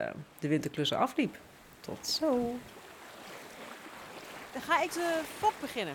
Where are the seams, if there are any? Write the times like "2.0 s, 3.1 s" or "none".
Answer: 4.9 s